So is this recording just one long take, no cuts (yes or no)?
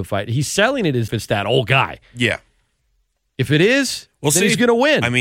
no